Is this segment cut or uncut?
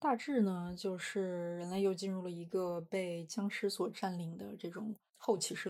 uncut